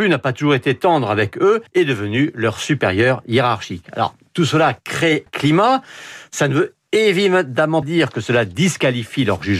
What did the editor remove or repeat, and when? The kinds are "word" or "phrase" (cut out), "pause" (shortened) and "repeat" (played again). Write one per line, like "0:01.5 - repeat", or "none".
0:01.7 - pause
0:05.3 - word
0:07.8 - word